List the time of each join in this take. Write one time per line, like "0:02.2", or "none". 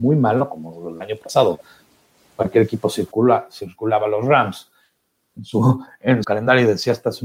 0:06.2